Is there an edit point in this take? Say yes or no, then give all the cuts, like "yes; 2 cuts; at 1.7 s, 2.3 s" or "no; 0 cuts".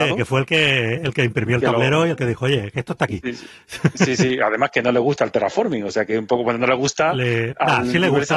no; 0 cuts